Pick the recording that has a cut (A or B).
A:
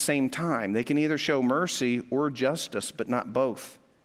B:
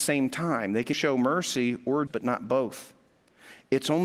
B